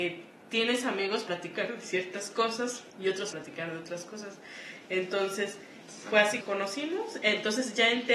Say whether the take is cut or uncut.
cut